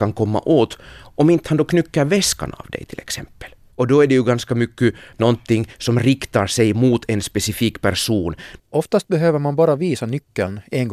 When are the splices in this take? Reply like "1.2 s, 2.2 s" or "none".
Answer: 8.6 s